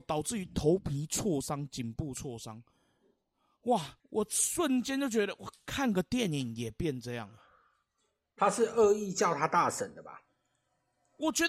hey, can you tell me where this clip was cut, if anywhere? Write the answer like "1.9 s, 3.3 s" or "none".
4.0 s